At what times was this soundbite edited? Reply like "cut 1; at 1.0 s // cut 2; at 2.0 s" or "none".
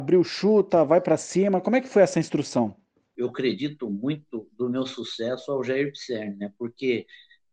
none